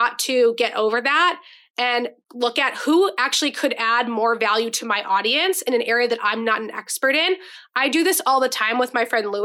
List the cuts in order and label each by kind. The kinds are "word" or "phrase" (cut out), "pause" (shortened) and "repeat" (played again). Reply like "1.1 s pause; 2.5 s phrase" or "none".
none